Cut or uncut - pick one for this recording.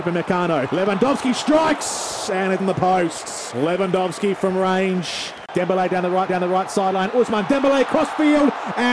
cut